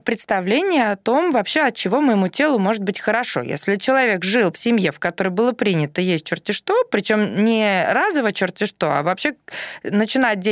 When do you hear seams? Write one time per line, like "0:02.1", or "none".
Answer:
none